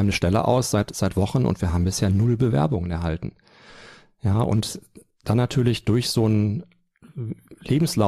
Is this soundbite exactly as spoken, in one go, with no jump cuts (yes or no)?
yes